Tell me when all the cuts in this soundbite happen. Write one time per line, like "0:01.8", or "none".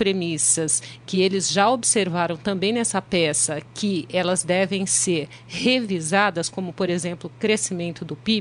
none